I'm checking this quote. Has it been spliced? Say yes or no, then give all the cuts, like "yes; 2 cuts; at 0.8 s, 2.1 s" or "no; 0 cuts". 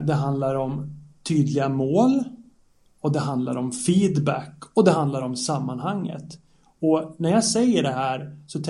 no; 0 cuts